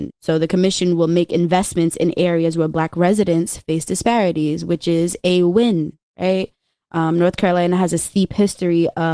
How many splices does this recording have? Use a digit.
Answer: 0